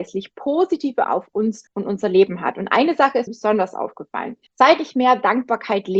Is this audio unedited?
no; 4 cuts; at 1.0 s, 1.7 s, 3.3 s, 4.5 s

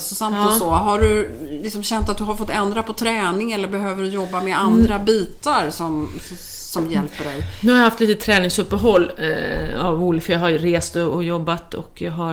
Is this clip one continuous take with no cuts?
yes; 0 cuts

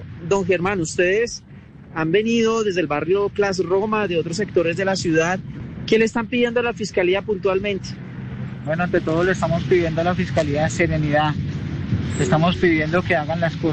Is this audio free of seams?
yes; 0 cuts

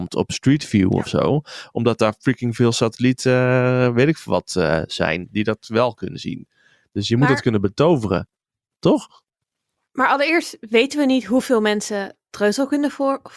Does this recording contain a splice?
no; 0 cuts

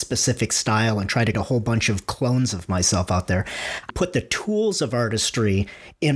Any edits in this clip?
yes; 2 cuts; at 1.3 s, 3.9 s

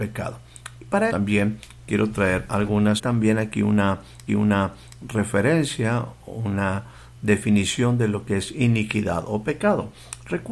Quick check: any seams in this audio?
yes; 3 cuts; at 1.1 s, 3.0 s, 4.3 s

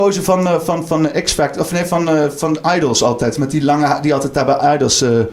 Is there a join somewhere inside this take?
no; 0 cuts

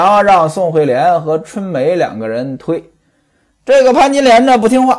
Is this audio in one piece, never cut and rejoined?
yes; 0 cuts

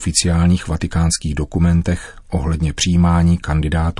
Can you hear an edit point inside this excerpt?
no; 0 cuts

